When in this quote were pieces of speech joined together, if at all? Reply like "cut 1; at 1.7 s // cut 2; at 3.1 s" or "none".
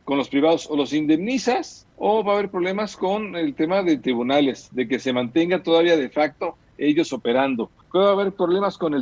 cut 1; at 1.9 s // cut 2; at 7.8 s